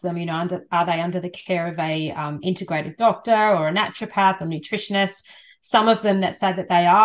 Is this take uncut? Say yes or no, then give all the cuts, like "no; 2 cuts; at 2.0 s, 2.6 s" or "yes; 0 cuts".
yes; 0 cuts